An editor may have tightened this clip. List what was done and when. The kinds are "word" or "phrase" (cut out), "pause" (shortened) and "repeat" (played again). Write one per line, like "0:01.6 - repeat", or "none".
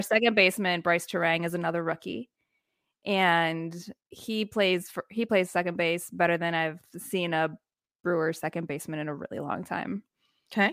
none